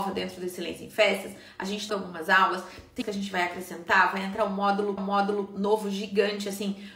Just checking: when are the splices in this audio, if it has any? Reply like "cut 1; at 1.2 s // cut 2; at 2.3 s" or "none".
cut 1; at 1.9 s // cut 2; at 3.0 s // cut 3; at 5.0 s